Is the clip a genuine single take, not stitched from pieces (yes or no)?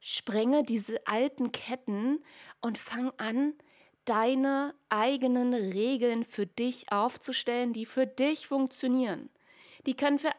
yes